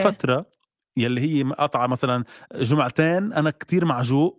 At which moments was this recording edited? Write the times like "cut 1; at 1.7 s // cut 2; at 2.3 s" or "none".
none